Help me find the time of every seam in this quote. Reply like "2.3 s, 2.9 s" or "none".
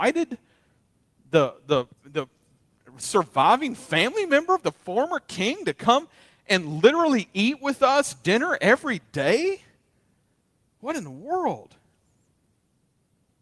1.9 s